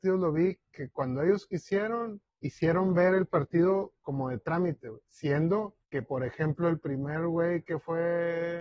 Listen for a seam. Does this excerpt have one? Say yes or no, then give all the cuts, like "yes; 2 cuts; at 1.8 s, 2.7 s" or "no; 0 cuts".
yes; 2 cuts; at 2.3 s, 5.8 s